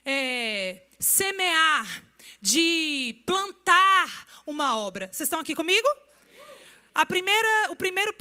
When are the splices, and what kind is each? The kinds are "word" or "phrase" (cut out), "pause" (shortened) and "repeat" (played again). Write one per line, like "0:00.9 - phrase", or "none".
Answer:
none